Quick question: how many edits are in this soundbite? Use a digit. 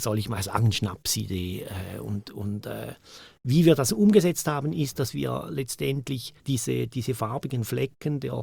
1